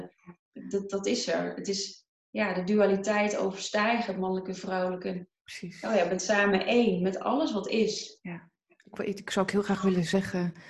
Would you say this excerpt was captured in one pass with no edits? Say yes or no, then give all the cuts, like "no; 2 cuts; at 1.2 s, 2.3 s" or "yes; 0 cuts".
yes; 0 cuts